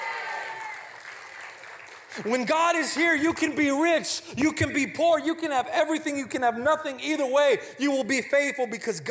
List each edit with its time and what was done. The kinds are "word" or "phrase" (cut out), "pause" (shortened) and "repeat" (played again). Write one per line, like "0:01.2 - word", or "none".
none